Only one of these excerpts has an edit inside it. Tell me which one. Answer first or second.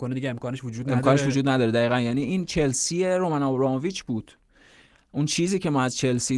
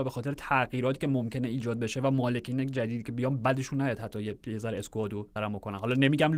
second